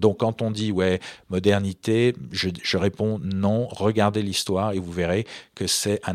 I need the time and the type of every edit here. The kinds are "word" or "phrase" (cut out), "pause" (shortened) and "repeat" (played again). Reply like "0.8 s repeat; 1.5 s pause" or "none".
none